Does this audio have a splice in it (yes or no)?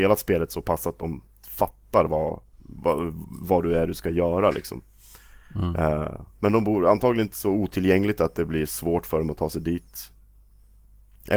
no